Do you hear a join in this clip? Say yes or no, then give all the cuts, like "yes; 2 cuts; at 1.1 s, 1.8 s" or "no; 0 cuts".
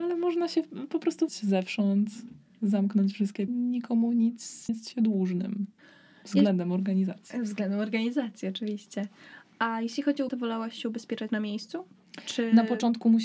yes; 6 cuts; at 1.3 s, 3.5 s, 4.7 s, 5.8 s, 10.3 s, 11.3 s